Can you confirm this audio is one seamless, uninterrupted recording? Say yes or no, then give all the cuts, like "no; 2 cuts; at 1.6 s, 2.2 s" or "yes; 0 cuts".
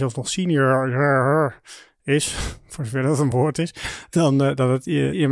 yes; 0 cuts